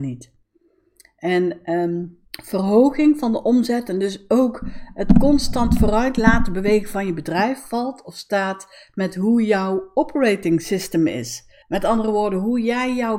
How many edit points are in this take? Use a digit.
2